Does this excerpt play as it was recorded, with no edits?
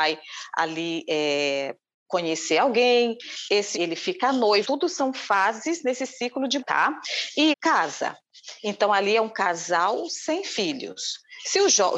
no; 4 cuts; at 3.7 s, 4.6 s, 6.6 s, 7.5 s

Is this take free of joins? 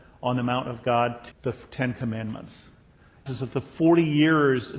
no; 2 cuts; at 1.3 s, 3.3 s

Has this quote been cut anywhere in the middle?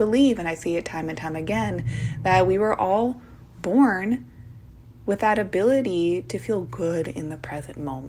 no; 0 cuts

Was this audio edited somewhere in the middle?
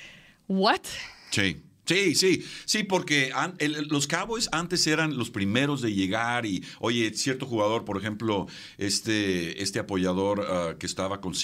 no; 0 cuts

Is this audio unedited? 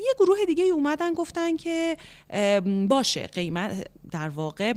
yes; 0 cuts

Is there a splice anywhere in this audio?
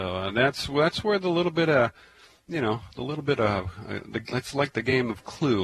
no; 0 cuts

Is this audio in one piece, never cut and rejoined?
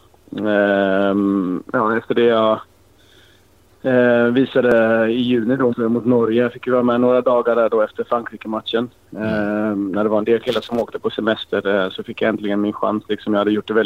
no; 1 cut; at 5.7 s

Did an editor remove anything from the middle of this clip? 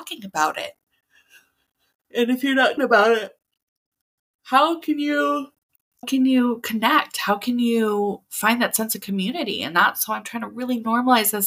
yes; 2 cuts; at 2.8 s, 6.0 s

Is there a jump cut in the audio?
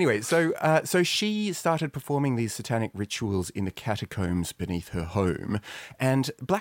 no; 0 cuts

